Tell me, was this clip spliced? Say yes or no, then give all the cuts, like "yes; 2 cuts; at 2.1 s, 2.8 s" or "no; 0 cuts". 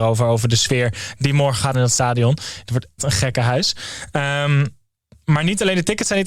yes; 2 cuts; at 1.7 s, 3.0 s